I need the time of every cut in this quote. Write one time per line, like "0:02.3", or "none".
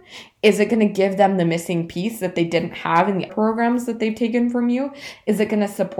0:03.3